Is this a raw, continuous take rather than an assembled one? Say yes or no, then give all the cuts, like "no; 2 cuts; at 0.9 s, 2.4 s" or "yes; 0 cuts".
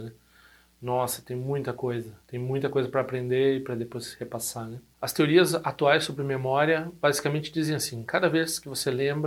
no; 1 cut; at 2.2 s